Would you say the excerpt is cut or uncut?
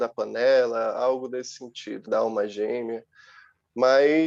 cut